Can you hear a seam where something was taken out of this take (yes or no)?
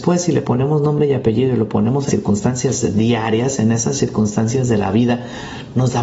yes